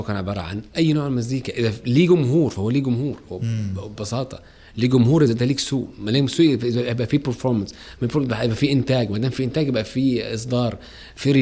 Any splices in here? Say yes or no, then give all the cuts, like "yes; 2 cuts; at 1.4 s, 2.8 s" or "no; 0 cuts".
no; 0 cuts